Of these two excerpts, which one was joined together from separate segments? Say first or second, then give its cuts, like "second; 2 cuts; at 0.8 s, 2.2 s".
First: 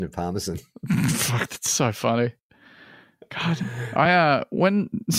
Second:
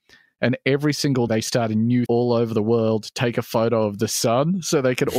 second; 2 cuts; at 1.3 s, 2.1 s